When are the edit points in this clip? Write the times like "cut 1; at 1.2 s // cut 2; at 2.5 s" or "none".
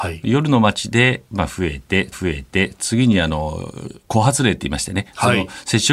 cut 1; at 2.1 s